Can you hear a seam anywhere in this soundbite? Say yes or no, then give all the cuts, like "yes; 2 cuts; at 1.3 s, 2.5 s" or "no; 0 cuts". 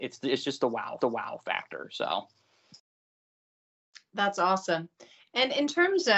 yes; 1 cut; at 1.0 s